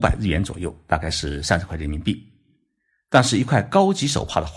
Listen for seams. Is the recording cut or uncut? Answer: uncut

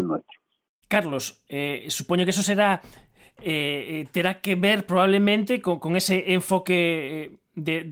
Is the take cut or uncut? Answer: uncut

